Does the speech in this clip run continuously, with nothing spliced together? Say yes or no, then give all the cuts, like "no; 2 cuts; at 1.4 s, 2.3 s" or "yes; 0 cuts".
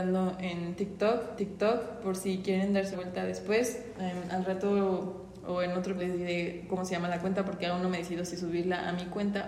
no; 3 cuts; at 1.4 s, 2.9 s, 6.0 s